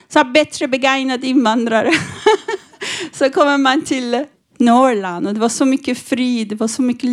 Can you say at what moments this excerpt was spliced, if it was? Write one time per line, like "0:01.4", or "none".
0:04.3